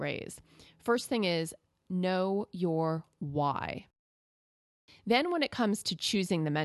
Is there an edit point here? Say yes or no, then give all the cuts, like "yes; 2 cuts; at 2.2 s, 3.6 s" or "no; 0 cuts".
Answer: no; 0 cuts